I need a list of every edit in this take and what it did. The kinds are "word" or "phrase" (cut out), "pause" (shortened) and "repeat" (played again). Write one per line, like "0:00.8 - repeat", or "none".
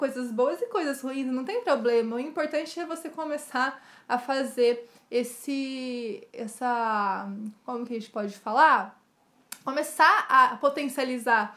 none